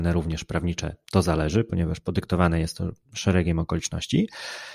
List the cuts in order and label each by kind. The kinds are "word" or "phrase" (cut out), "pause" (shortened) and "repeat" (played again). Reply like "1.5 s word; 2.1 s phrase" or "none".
none